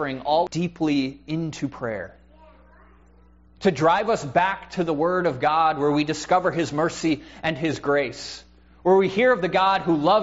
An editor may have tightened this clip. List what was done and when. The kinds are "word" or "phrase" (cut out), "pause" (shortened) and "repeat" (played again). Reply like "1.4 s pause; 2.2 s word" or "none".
none